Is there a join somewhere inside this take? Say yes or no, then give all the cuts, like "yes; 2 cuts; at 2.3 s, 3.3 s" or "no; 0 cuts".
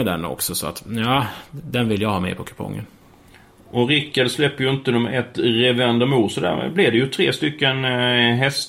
no; 0 cuts